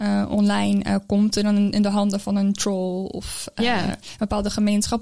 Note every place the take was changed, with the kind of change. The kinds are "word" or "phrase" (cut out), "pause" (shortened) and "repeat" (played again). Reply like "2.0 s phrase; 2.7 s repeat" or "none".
none